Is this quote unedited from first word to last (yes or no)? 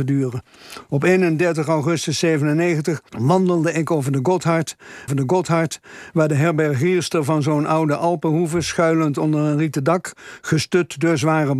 no